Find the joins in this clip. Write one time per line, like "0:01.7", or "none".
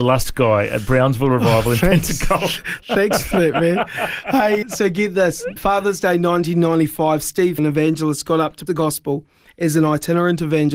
0:04.6
0:05.6
0:07.6
0:08.7